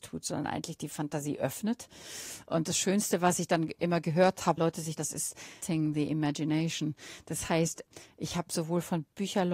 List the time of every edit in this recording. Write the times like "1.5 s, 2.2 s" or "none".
4.6 s, 5.0 s, 5.6 s